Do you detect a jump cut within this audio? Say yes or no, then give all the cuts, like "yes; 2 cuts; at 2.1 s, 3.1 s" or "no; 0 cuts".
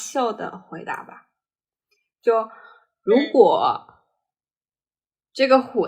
no; 0 cuts